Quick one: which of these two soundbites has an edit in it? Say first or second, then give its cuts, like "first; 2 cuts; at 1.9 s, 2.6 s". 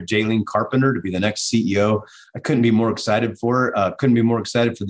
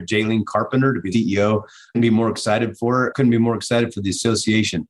second; 3 cuts; at 1.1 s, 1.9 s, 3.1 s